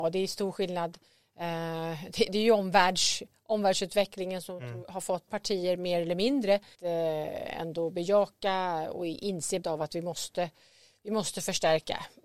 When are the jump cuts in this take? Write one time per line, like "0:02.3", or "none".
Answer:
0:05.3
0:06.7
0:09.6